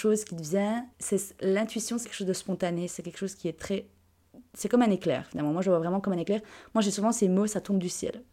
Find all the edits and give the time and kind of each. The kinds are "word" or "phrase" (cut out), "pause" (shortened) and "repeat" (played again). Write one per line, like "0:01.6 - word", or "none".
0:00.9 - pause
0:02.0 - word